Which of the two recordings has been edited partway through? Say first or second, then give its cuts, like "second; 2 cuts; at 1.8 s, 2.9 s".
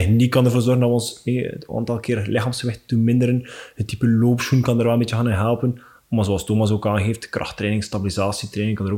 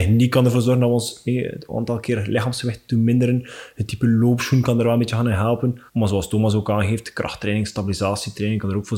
second; 1 cut; at 5.9 s